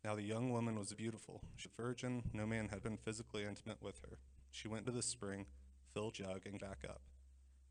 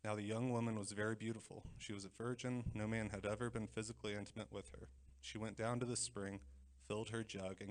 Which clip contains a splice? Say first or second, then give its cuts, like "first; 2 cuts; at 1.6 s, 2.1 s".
first; 6 cuts; at 0.9 s, 1.6 s, 2.8 s, 4.8 s, 6.1 s, 6.6 s